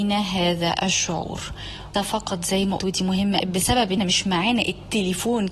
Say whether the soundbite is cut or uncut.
cut